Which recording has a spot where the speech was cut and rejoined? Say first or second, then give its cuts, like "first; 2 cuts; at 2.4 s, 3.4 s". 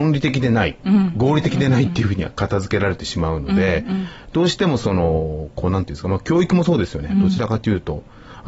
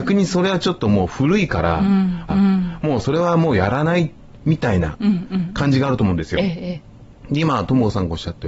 second; 1 cut; at 2.3 s